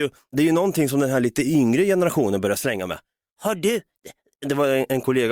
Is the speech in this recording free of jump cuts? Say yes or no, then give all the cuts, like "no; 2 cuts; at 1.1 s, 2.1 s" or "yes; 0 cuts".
yes; 0 cuts